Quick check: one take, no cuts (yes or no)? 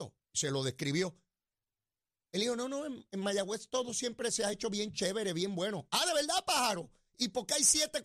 yes